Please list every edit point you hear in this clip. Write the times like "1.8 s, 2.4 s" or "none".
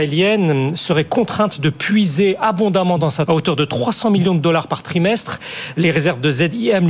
3.3 s